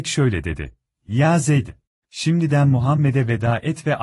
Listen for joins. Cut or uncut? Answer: cut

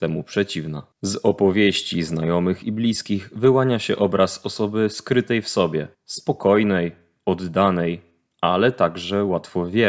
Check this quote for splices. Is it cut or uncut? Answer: cut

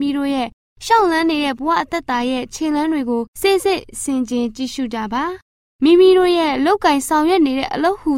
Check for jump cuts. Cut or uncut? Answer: cut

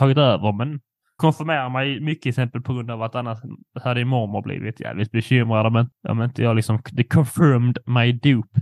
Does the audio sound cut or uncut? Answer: cut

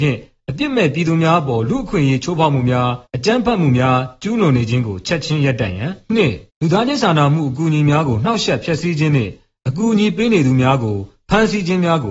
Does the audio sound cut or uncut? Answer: cut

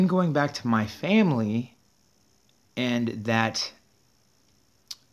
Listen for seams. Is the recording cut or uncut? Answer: uncut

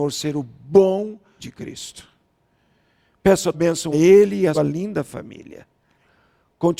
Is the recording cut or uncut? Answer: cut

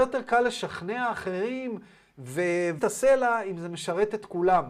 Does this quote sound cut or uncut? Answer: cut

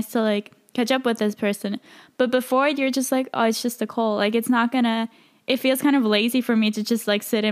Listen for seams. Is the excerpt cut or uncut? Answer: uncut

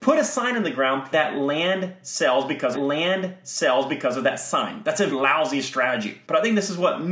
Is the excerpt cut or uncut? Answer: cut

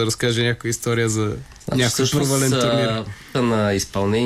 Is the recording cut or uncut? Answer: cut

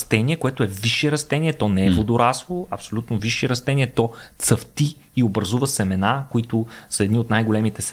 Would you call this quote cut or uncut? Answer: uncut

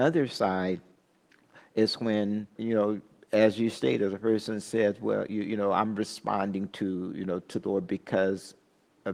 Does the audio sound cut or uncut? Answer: cut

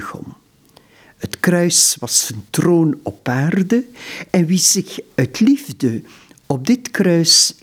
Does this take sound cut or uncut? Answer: uncut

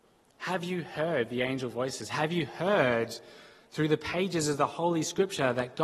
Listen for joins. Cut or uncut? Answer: uncut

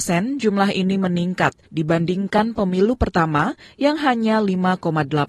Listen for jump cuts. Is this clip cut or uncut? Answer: uncut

